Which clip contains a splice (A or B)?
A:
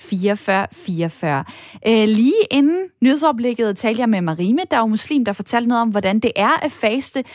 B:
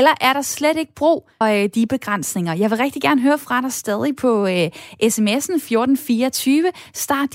B